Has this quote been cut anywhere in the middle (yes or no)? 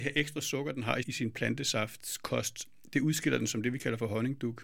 yes